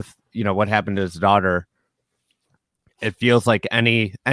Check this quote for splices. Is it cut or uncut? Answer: uncut